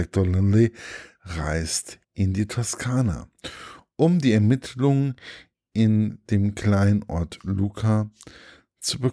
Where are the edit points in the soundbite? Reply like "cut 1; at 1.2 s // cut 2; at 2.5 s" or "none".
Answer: cut 1; at 2.0 s